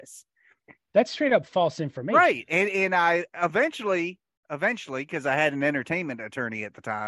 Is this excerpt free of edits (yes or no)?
yes